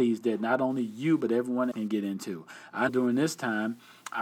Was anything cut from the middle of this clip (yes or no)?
yes